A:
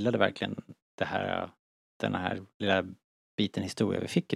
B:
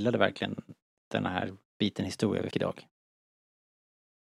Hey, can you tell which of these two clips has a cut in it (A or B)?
B